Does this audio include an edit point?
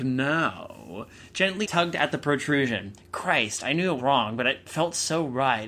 yes; 2 cuts; at 1.6 s, 4.0 s

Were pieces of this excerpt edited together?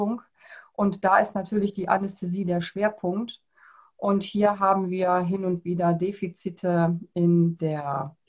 no; 0 cuts

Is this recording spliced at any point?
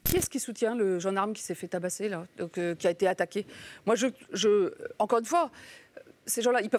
no; 0 cuts

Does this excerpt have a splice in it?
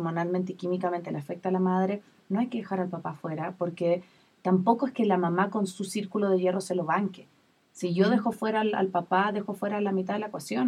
no; 0 cuts

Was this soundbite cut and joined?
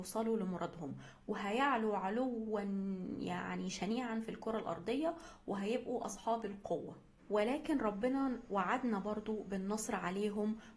no; 0 cuts

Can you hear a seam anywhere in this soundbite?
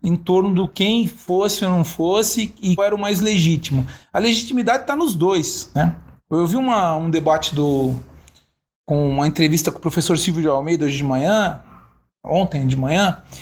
yes; 1 cut; at 2.8 s

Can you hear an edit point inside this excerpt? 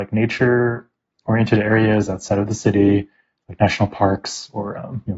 no; 0 cuts

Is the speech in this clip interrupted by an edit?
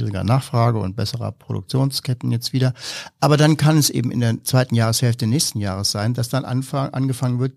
no; 0 cuts

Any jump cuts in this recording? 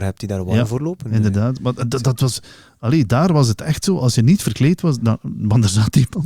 no; 0 cuts

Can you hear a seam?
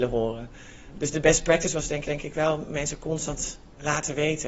yes; 1 cut; at 2.0 s

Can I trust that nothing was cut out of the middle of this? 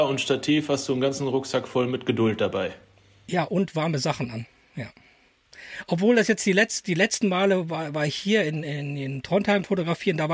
yes; 0 cuts

